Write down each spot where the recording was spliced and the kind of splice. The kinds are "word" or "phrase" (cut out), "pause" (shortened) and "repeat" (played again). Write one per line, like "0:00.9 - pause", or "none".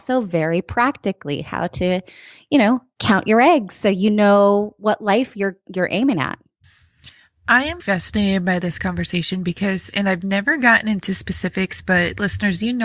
0:07.8 - word